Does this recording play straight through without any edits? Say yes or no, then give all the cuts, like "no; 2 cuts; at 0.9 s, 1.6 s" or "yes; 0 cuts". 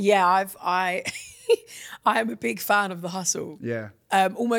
yes; 0 cuts